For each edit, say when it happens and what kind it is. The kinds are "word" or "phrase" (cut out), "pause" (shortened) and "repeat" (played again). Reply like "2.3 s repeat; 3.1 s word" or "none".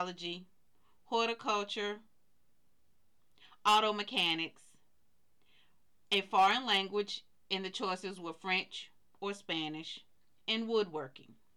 none